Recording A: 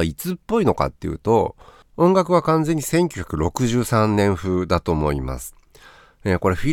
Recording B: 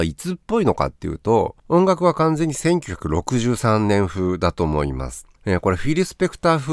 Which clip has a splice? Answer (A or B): B